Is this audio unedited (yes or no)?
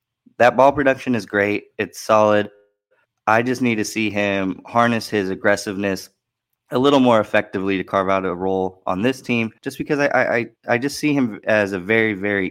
no